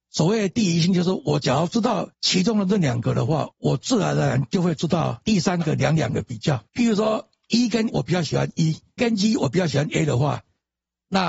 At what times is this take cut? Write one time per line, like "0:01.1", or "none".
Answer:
0:02.2
0:03.5
0:06.7
0:07.9
0:09.0